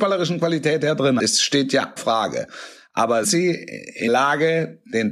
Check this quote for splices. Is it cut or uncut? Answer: cut